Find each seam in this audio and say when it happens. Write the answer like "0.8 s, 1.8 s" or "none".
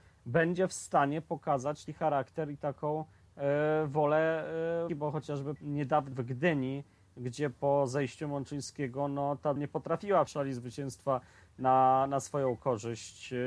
1.9 s, 4.9 s, 5.6 s, 6.1 s, 9.6 s, 10.3 s